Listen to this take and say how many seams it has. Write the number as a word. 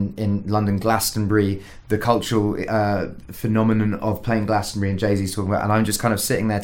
zero